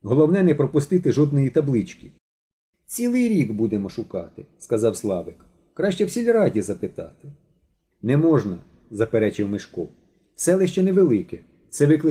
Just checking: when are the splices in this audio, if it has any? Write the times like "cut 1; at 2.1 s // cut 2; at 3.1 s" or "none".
none